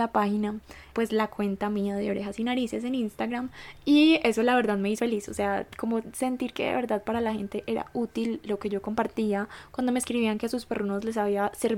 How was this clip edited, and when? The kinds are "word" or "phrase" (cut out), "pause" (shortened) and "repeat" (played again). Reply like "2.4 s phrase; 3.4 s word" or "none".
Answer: 0.9 s word; 5.0 s word